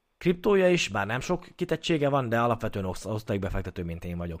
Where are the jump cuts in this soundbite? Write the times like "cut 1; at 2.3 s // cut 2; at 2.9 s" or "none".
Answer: none